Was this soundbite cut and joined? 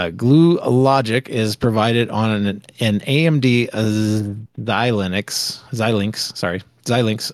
no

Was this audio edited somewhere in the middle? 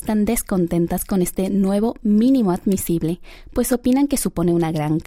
no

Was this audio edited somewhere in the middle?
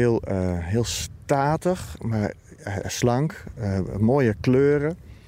no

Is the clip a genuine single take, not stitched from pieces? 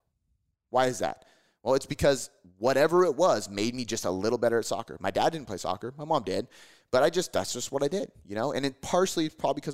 yes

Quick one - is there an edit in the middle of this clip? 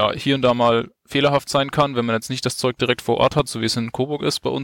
no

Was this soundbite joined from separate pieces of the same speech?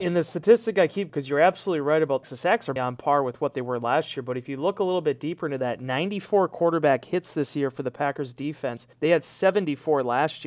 yes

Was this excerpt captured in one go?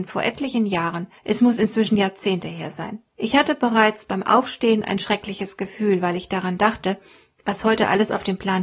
no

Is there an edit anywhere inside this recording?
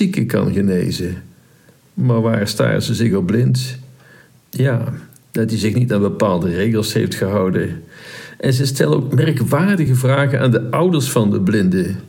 no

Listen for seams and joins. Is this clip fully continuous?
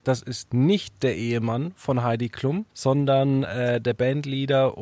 no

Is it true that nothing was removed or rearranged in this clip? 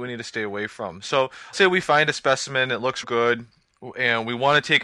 no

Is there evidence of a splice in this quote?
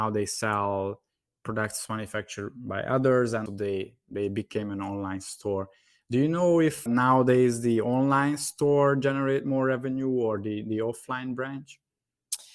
yes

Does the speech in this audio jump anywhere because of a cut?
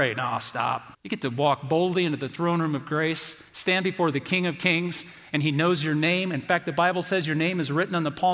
yes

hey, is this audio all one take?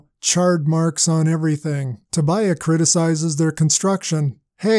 no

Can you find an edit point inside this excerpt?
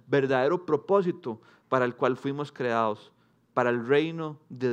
no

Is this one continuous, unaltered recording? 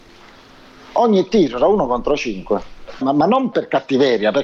no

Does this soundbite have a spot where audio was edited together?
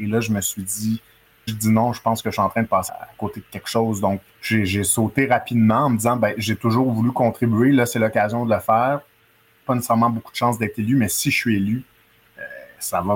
yes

